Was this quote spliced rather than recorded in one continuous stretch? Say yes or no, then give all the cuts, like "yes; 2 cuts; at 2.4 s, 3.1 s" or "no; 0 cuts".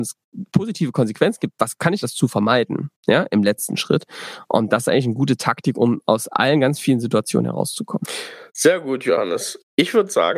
yes; 2 cuts; at 2.0 s, 2.9 s